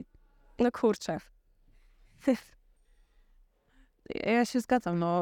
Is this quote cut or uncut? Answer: uncut